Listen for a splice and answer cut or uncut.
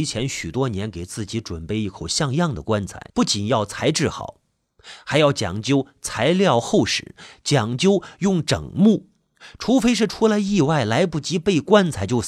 cut